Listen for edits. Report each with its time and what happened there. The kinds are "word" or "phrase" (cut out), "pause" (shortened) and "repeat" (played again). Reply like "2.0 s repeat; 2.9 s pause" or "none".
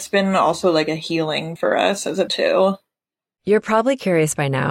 1.6 s word; 2.3 s word